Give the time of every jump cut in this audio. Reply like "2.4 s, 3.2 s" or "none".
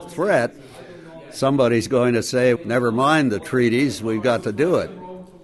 2.6 s